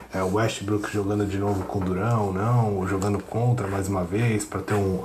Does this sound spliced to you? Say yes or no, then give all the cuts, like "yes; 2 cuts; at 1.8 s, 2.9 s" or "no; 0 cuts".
no; 0 cuts